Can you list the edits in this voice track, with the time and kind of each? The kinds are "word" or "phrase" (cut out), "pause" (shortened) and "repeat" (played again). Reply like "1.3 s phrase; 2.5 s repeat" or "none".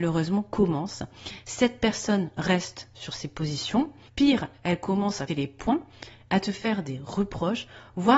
5.3 s word